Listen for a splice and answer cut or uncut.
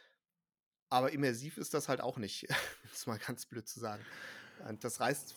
uncut